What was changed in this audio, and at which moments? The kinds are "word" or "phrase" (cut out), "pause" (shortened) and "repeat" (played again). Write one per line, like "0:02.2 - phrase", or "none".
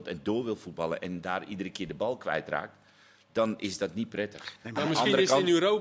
none